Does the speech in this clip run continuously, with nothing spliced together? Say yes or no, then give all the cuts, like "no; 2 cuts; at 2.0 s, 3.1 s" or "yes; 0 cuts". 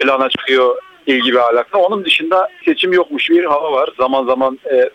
no; 2 cuts; at 2.6 s, 3.3 s